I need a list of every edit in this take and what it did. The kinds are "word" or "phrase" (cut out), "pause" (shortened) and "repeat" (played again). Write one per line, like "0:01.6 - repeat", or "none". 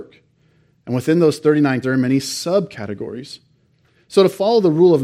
0:01.8 - word